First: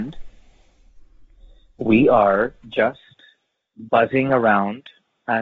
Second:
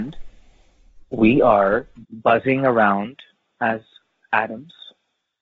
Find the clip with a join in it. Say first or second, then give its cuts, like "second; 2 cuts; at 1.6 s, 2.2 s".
second; 2 cuts; at 1.0 s, 2.0 s